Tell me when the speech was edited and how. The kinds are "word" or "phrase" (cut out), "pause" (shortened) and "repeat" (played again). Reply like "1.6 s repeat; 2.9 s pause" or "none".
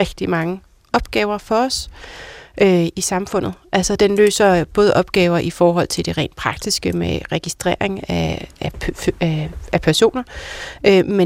none